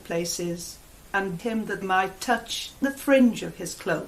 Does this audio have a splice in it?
yes; 3 cuts; at 1.4 s, 1.8 s, 2.8 s

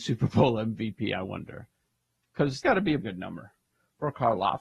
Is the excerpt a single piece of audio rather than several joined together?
no; 2 cuts; at 2.6 s, 3.0 s

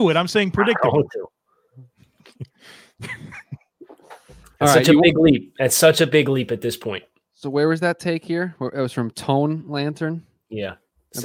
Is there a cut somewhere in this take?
no; 0 cuts

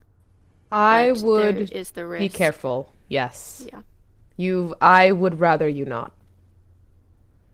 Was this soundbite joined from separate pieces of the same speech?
no; 0 cuts

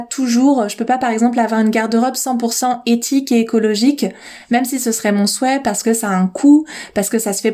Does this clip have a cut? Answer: no; 0 cuts

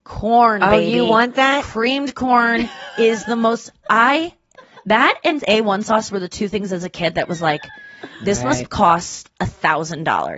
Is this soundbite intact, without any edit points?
yes; 0 cuts

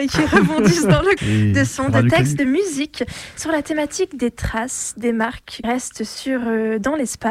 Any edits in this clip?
yes; 3 cuts; at 1.2 s, 2.4 s, 5.6 s

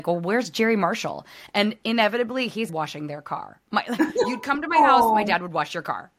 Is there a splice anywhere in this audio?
yes; 1 cut; at 2.7 s

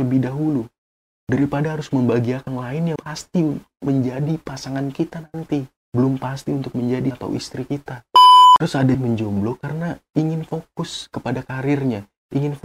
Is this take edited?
yes; 5 cuts; at 2.5 s, 3.0 s, 5.8 s, 7.1 s, 8.9 s

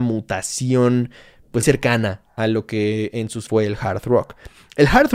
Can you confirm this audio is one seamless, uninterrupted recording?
no; 2 cuts; at 1.6 s, 3.5 s

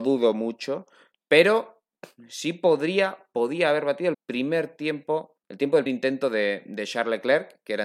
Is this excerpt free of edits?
no; 3 cuts; at 4.1 s, 5.4 s, 5.9 s

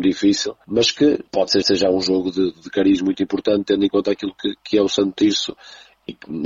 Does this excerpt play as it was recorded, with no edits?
no; 1 cut; at 1.6 s

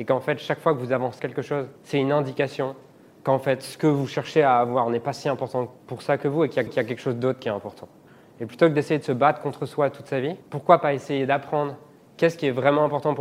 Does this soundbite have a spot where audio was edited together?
yes; 6 cuts; at 1.2 s, 1.8 s, 5.8 s, 6.7 s, 8.1 s, 10.4 s

